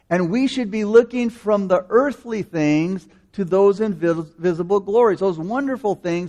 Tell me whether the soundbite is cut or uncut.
uncut